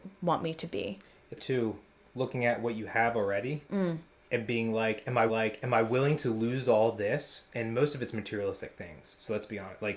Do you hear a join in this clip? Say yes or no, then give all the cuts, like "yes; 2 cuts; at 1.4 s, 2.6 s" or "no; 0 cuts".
yes; 4 cuts; at 1.4 s, 3.6 s, 5.3 s, 7.5 s